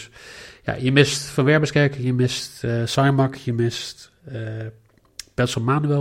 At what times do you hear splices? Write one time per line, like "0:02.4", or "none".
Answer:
none